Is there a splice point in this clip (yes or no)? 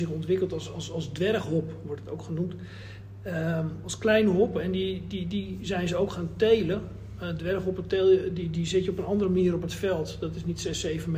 no